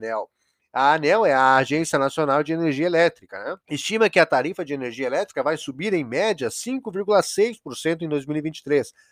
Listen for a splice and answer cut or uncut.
cut